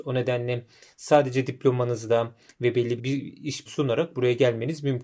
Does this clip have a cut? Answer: yes; 2 cuts; at 3.0 s, 3.7 s

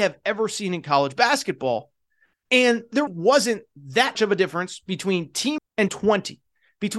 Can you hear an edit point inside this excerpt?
yes; 4 cuts; at 3.1 s, 4.1 s, 5.6 s, 5.9 s

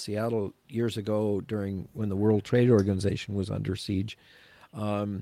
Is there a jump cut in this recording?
no; 0 cuts

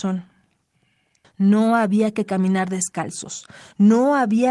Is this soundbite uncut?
yes; 0 cuts

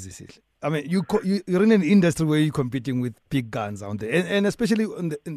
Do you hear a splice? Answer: no; 0 cuts

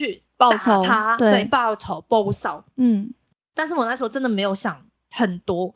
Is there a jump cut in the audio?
no; 0 cuts

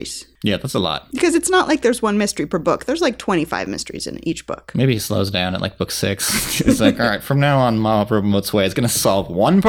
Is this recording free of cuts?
yes; 0 cuts

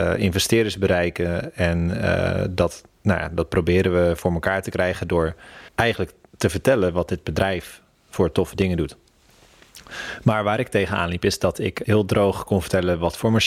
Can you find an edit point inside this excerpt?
yes; 2 cuts; at 2.9 s, 5.7 s

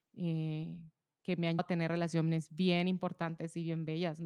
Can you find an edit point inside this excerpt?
yes; 2 cuts; at 1.0 s, 1.6 s

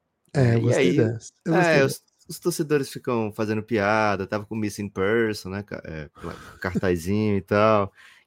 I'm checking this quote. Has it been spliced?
yes; 1 cut; at 1.4 s

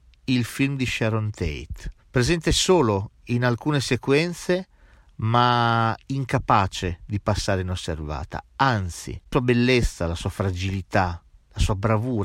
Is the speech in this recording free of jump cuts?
no; 2 cuts; at 2.0 s, 9.3 s

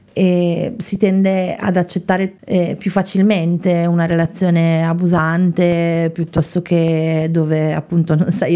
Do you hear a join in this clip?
no; 0 cuts

